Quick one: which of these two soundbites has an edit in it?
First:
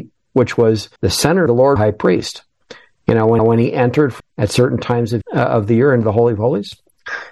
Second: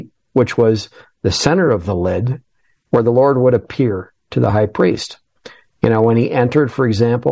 first; 6 cuts; at 1.0 s, 1.5 s, 1.8 s, 3.4 s, 4.2 s, 5.2 s

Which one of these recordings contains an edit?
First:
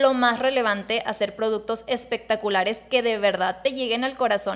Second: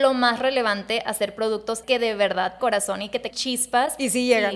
second; 3 cuts; at 1.8 s, 2.6 s, 3.3 s

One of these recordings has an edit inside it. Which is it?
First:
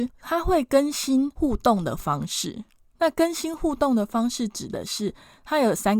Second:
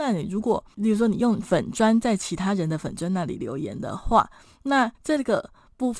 second; 1 cut; at 4.9 s

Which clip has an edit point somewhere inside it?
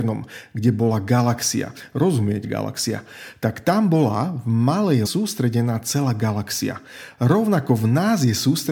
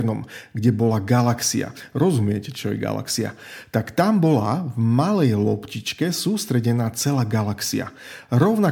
first; 2 cuts; at 2.4 s, 5.0 s

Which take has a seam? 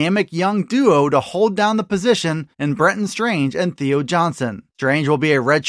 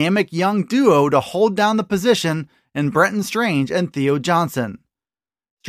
first; 2 cuts; at 2.5 s, 4.7 s

